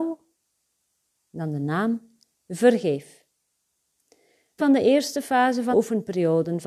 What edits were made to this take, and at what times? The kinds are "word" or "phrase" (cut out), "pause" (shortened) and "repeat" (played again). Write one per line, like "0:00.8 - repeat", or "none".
0:04.6 - word
0:05.7 - word

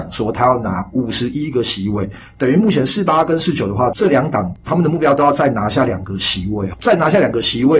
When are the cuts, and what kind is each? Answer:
0:06.7 - word

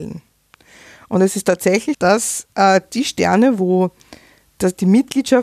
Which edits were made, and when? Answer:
0:01.9 - word

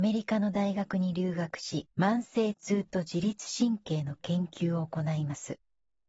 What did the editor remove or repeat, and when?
0:01.9 - pause

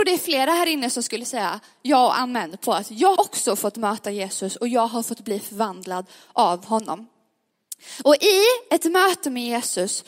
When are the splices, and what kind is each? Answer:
0:03.2 - word

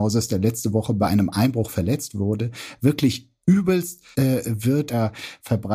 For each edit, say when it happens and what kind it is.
0:04.1 - word

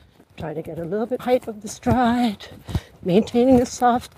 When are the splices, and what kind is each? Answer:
0:01.2 - word

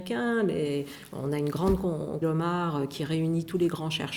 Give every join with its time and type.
0:02.2 - phrase

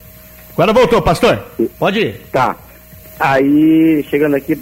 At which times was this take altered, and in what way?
0:01.7 - pause
0:03.0 - pause

